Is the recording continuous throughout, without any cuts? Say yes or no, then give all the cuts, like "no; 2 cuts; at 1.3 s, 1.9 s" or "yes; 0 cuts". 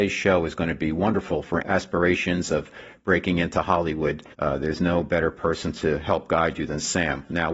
no; 2 cuts; at 1.6 s, 4.3 s